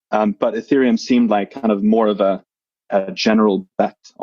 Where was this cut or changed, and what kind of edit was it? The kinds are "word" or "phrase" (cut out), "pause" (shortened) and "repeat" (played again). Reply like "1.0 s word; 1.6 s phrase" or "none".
none